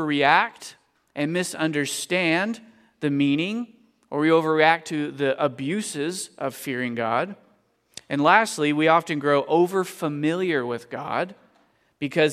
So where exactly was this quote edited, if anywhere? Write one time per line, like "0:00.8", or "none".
none

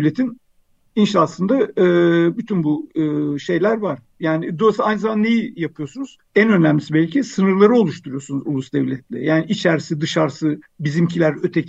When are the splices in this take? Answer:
0:06.3

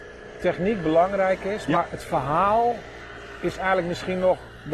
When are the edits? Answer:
none

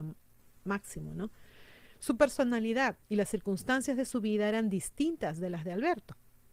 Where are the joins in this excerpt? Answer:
0:03.0

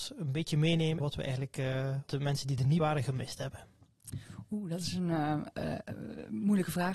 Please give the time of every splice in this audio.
0:01.0
0:02.1
0:02.8

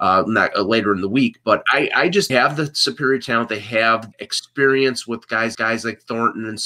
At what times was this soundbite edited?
0:01.7
0:02.3
0:04.1
0:05.5

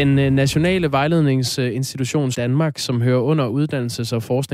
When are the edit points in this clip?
0:02.3

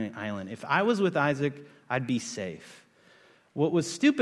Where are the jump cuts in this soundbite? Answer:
none

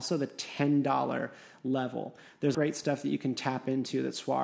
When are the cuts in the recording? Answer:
0:02.5

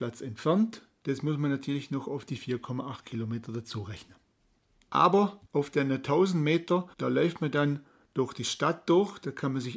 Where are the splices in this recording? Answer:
0:05.5
0:06.9

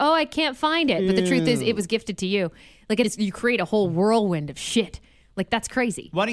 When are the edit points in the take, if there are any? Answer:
0:03.0

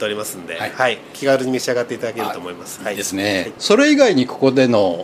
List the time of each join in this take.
none

